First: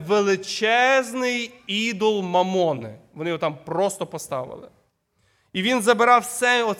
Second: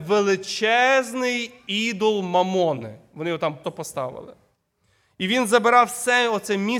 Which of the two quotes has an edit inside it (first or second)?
second